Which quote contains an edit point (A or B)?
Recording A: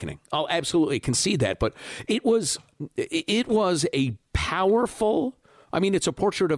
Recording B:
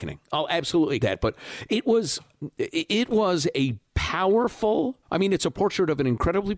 B